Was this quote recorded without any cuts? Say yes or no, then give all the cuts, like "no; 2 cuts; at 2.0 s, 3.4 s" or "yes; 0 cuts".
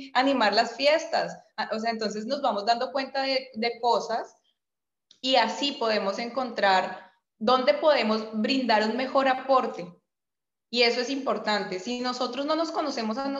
yes; 0 cuts